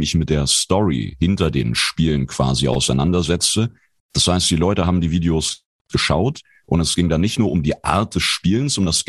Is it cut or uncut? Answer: uncut